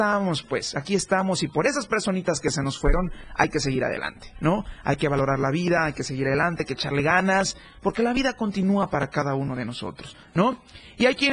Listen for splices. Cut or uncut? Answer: uncut